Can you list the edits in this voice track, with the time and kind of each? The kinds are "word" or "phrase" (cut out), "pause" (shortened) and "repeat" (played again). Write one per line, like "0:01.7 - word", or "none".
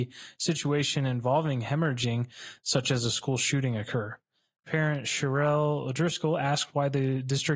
none